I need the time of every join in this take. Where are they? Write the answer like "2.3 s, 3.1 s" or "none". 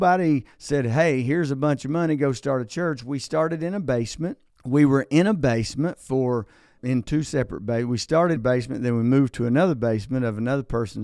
4.5 s, 6.8 s, 8.4 s